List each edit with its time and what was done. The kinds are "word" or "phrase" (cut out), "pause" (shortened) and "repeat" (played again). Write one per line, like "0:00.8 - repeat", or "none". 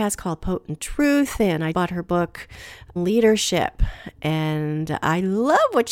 0:01.7 - word
0:03.0 - word